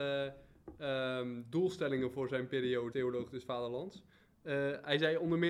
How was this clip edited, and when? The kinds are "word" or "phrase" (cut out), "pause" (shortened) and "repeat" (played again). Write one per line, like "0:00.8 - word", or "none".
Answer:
0:02.9 - word